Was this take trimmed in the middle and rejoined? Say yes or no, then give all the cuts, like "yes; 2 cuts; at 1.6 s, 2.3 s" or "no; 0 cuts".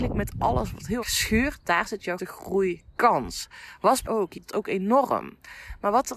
yes; 4 cuts; at 1.0 s, 2.2 s, 4.1 s, 4.4 s